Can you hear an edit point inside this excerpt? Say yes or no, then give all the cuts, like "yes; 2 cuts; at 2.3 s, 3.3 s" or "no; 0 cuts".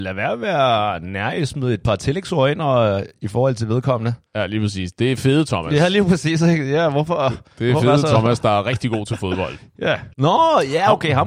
yes; 2 cuts; at 4.3 s, 10.1 s